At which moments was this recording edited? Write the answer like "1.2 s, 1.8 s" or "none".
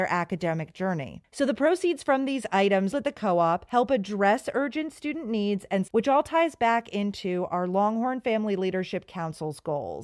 2.9 s, 5.9 s